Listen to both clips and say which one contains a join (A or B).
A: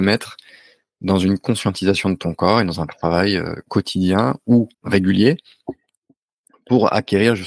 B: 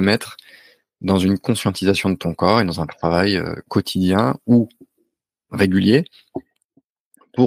A